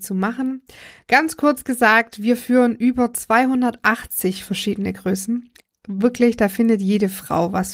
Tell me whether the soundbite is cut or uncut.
uncut